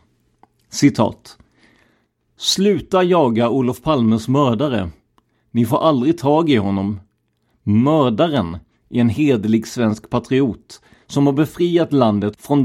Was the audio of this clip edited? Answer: no; 0 cuts

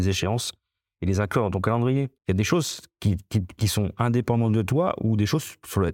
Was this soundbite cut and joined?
yes; 1 cut; at 2.2 s

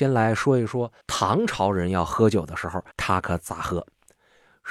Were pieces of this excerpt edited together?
yes; 2 cuts; at 1.0 s, 2.9 s

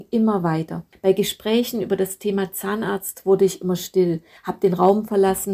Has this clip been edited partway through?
no; 0 cuts

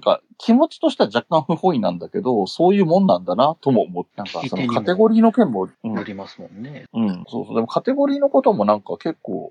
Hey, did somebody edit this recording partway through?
yes; 1 cut; at 4.1 s

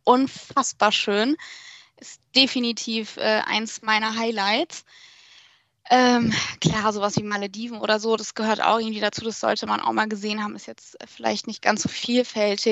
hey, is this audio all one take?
yes; 0 cuts

